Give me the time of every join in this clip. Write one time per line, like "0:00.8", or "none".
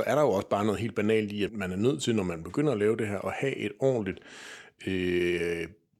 0:01.5